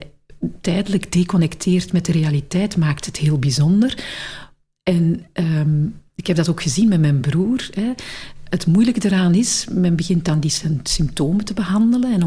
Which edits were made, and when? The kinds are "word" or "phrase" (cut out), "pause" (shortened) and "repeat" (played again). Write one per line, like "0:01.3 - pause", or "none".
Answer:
none